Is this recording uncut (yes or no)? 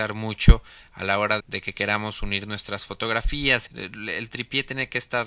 no